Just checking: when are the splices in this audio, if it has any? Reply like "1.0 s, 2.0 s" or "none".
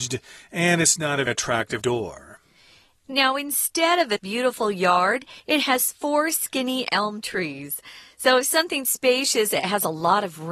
1.3 s, 1.8 s, 4.2 s, 5.4 s